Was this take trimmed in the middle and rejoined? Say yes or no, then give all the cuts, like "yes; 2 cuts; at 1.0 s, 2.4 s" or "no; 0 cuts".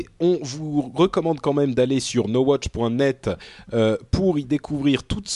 no; 0 cuts